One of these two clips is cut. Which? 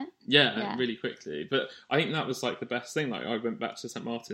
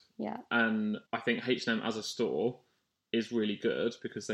second; 1 cut; at 1.1 s

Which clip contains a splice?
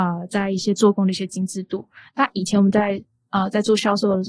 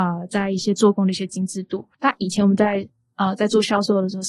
second; 1 cut; at 1.9 s

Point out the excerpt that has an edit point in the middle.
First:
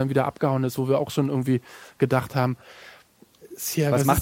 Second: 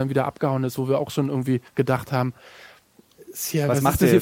second; 1 cut; at 1.7 s

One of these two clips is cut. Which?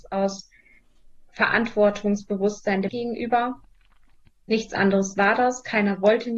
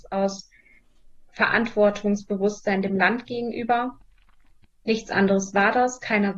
first; 1 cut; at 2.9 s

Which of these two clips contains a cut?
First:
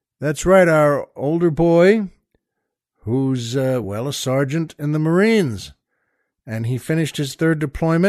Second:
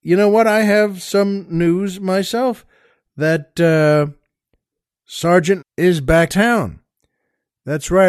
second; 2 cuts; at 5.6 s, 6.3 s

